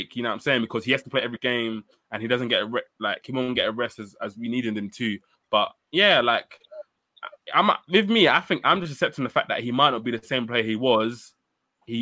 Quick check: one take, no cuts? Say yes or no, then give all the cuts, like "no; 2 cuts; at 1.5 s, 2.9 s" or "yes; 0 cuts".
yes; 0 cuts